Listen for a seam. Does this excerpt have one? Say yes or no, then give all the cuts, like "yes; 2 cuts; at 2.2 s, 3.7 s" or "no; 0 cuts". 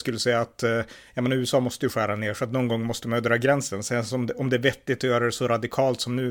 no; 0 cuts